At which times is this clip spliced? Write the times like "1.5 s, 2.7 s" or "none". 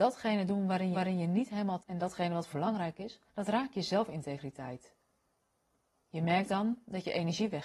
0.9 s, 1.8 s, 2.5 s, 3.3 s